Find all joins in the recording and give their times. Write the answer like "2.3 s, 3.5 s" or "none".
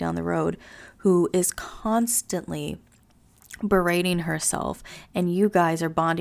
none